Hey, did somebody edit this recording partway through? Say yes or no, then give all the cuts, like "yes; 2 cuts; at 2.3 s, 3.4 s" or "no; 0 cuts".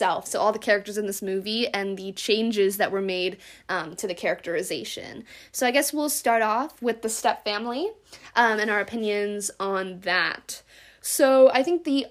no; 0 cuts